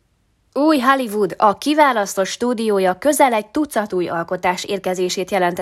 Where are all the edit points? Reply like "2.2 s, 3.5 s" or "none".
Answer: none